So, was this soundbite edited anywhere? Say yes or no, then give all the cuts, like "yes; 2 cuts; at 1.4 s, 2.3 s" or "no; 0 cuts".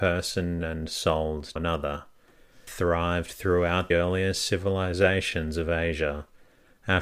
yes; 3 cuts; at 1.6 s, 2.7 s, 3.9 s